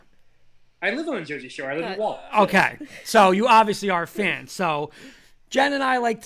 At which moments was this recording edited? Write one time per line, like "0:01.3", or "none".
none

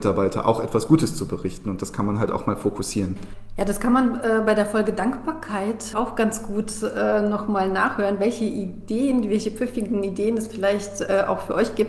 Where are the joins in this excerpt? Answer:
0:05.9

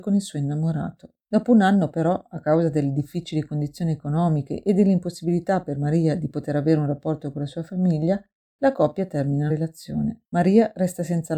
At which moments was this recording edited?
0:09.5
0:10.2

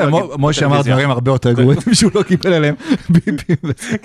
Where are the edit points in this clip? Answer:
none

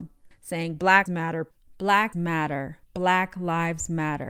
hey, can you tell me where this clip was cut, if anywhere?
0:01.1
0:02.1
0:02.8

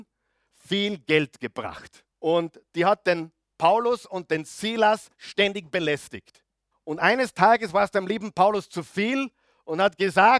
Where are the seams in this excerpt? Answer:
0:02.1
0:06.7

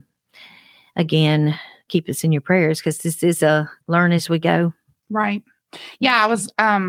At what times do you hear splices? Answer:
0:03.8

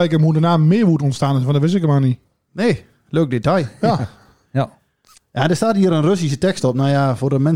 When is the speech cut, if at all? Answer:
none

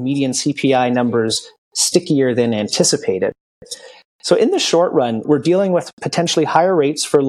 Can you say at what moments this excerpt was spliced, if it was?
0:05.2

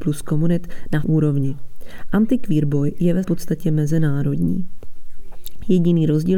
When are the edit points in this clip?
0:01.0
0:03.2

